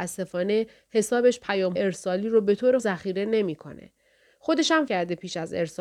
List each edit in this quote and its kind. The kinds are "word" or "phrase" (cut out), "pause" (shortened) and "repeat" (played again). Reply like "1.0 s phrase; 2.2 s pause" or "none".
1.8 s word; 2.8 s word; 4.9 s word

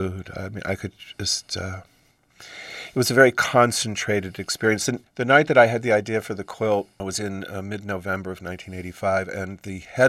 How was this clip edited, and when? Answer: none

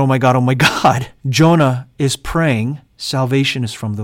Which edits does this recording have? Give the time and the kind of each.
1.2 s pause; 2.9 s pause

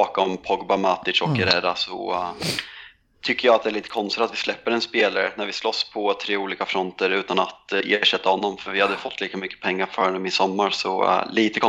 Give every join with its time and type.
none

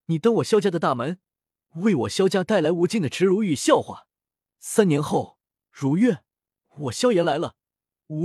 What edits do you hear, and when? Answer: none

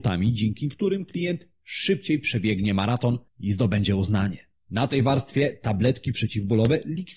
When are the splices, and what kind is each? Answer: 3.3 s pause

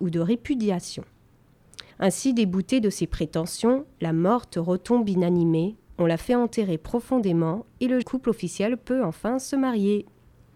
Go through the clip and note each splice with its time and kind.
1.9 s pause; 8.0 s word

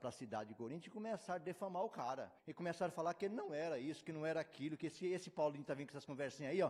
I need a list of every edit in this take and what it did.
2.4 s pause

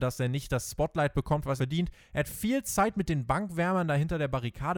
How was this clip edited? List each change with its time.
1.6 s word

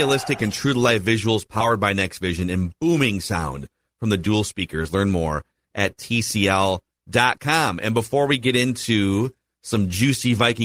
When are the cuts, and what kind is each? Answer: none

